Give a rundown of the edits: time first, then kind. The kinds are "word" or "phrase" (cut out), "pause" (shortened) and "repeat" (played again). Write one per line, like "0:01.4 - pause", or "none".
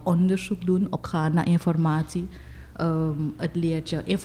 0:01.0 - word